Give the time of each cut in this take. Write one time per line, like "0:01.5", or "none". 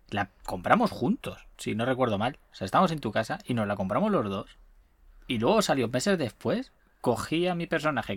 0:01.5
0:04.8
0:06.8